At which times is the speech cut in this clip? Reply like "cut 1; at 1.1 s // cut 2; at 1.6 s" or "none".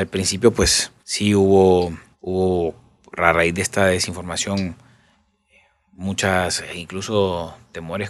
cut 1; at 1.0 s // cut 2; at 2.1 s